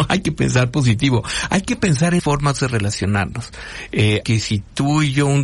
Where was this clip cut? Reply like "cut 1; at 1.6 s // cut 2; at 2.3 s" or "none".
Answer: cut 1; at 2.2 s // cut 2; at 4.2 s